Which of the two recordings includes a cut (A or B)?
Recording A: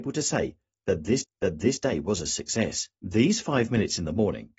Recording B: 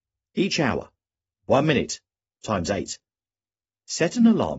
A